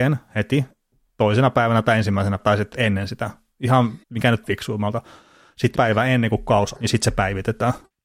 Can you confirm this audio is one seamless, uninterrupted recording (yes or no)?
no